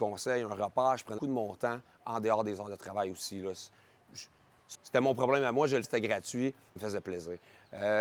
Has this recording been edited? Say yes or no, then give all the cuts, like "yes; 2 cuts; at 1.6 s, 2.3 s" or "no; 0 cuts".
yes; 4 cuts; at 1.2 s, 4.7 s, 5.8 s, 6.8 s